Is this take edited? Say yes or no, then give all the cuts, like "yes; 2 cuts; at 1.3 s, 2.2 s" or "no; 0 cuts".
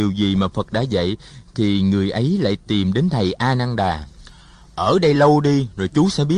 no; 0 cuts